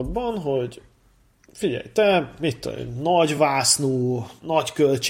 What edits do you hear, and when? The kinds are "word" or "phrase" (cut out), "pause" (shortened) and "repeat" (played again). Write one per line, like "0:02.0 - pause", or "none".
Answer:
none